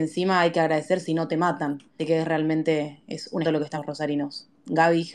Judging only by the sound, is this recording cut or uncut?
cut